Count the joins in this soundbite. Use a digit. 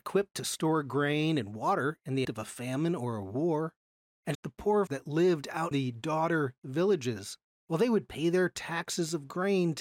4